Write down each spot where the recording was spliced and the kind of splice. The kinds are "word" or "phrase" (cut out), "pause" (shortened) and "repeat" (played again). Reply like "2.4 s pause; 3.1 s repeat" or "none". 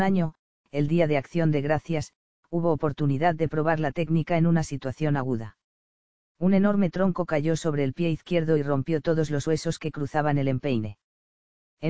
none